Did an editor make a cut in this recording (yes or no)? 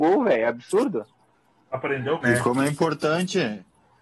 yes